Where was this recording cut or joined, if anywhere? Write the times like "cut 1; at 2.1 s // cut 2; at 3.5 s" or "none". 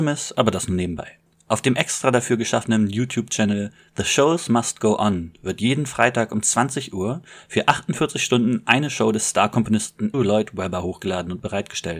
cut 1; at 1.3 s // cut 2; at 10.1 s